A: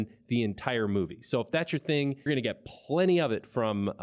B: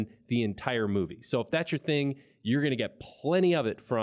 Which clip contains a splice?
A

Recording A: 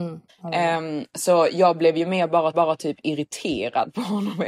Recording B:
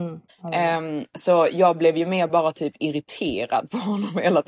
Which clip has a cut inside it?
A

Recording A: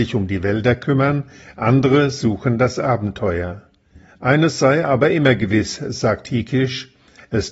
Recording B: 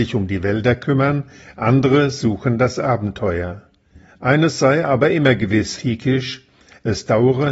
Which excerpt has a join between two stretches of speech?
B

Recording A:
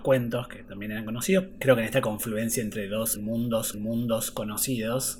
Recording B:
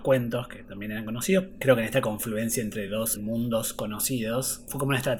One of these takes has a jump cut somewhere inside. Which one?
A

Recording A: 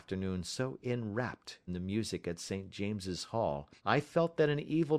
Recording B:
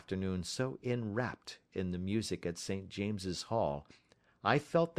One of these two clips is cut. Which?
A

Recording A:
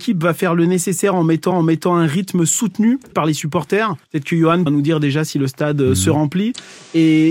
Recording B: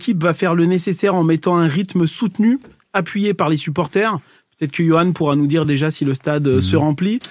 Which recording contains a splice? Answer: A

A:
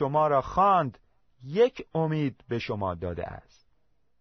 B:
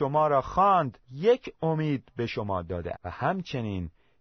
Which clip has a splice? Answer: B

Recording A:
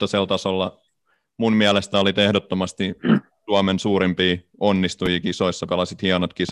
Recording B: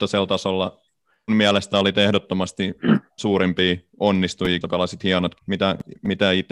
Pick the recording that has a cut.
B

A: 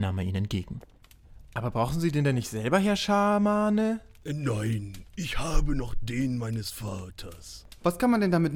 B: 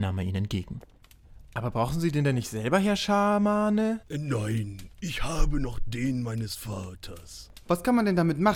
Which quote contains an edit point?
B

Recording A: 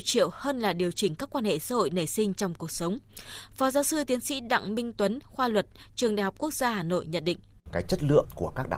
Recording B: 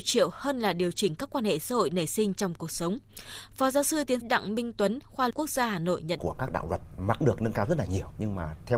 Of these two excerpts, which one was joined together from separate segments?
B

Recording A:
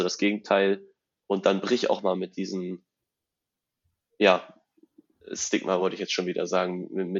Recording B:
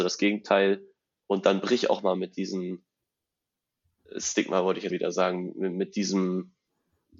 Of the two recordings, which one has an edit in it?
B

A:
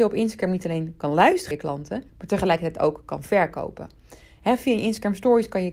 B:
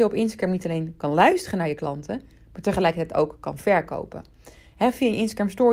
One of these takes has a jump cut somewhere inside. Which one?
A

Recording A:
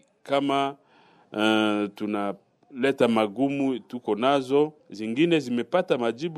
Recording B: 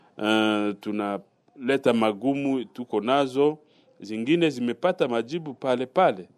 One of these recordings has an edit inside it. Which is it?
A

